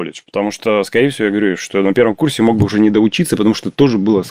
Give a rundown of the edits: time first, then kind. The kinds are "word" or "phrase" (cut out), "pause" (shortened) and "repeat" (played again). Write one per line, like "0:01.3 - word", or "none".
none